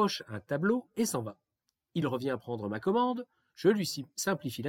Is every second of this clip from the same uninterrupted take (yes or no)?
yes